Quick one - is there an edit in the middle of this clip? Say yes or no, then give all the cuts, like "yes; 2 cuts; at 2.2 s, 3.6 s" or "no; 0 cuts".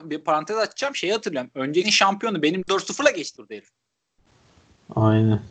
yes; 3 cuts; at 1.8 s, 2.6 s, 3.3 s